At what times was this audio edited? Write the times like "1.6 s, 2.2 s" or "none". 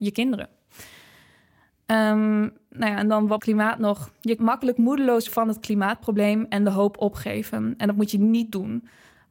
3.4 s, 4.4 s, 5.3 s